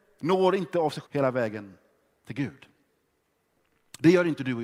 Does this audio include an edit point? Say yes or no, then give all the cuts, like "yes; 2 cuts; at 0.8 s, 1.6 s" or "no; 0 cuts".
yes; 1 cut; at 1.0 s